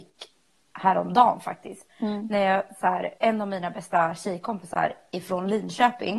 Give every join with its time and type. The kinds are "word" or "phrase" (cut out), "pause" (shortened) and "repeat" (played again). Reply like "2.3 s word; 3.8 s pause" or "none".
1.9 s pause; 3.2 s pause